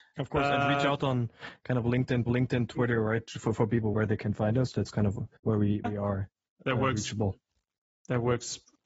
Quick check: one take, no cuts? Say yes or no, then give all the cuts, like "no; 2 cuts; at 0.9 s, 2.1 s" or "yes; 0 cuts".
no; 4 cuts; at 2.3 s, 3.9 s, 5.4 s, 5.8 s